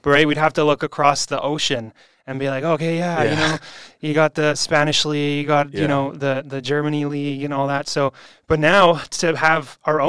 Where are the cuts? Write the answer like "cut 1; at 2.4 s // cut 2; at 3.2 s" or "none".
cut 1; at 8.3 s